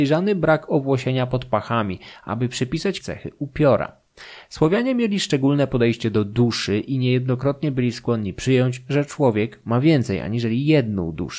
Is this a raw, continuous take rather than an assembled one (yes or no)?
no